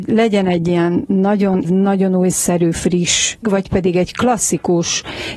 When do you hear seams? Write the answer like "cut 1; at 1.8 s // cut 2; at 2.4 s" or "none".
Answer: cut 1; at 1.6 s // cut 2; at 3.4 s